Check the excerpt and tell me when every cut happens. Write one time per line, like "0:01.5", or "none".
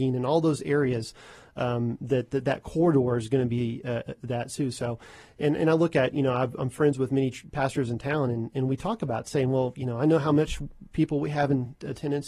none